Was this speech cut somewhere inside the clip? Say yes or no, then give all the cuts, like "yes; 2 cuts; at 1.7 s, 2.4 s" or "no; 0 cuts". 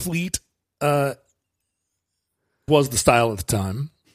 yes; 1 cut; at 2.7 s